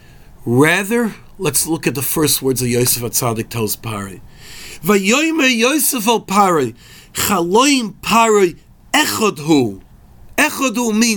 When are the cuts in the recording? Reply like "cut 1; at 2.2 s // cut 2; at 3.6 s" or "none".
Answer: none